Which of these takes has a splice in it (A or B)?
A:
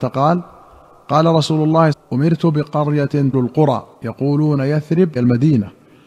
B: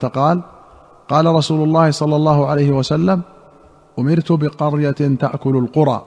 A